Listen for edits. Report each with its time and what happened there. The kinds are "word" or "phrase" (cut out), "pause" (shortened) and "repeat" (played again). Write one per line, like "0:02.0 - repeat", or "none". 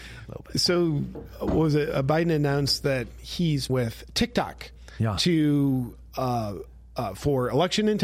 0:03.7 - word